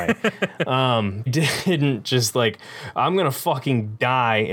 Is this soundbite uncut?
no; 1 cut; at 1.3 s

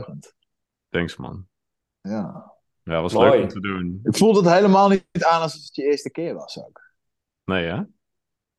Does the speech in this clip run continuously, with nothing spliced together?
yes; 0 cuts

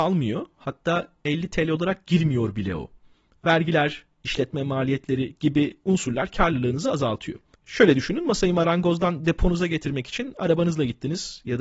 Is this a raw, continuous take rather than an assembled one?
yes; 0 cuts

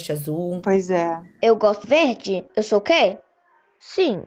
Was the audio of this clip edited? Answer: yes; 2 cuts; at 1.8 s, 2.5 s

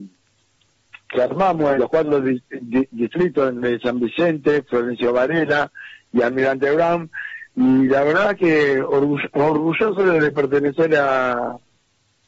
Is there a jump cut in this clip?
yes; 1 cut; at 1.8 s

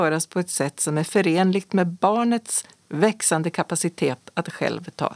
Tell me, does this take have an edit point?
no; 0 cuts

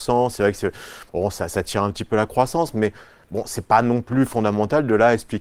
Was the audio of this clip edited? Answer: no; 0 cuts

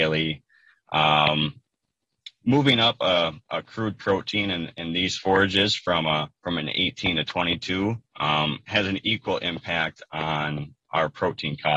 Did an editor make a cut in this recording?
yes; 3 cuts; at 3.4 s, 6.4 s, 8.1 s

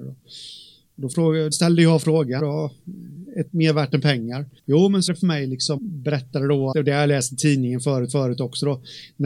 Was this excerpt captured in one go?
no; 8 cuts; at 1.5 s, 2.4 s, 3.5 s, 4.6 s, 5.1 s, 5.8 s, 6.7 s, 8.1 s

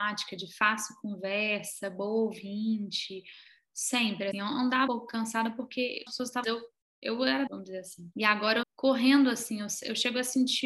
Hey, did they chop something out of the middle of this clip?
yes; 7 cuts; at 4.3 s, 4.9 s, 6.1 s, 6.4 s, 7.5 s, 8.1 s, 8.6 s

